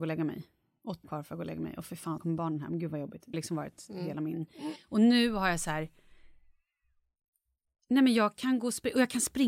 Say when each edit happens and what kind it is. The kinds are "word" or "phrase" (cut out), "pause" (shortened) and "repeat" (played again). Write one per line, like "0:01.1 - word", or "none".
0:01.0 - word
0:02.2 - word
0:03.3 - word